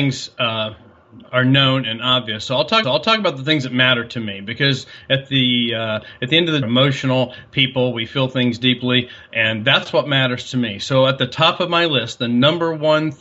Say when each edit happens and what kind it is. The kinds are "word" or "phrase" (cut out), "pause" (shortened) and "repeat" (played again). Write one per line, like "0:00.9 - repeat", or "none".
0:01.3 - pause
0:02.8 - repeat
0:06.6 - phrase